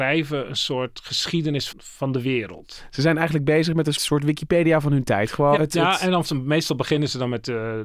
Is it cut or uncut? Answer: cut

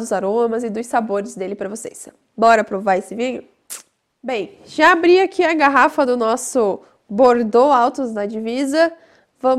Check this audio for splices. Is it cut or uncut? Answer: uncut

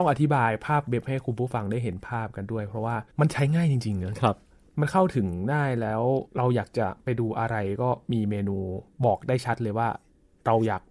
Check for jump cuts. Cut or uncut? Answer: cut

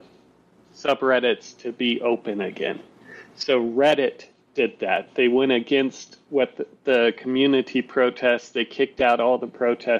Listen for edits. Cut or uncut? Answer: uncut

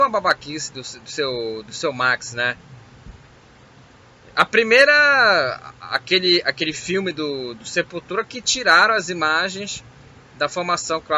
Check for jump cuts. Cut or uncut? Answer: uncut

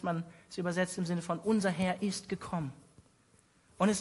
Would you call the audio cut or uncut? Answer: uncut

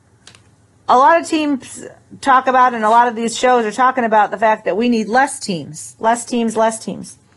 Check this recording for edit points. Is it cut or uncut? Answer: uncut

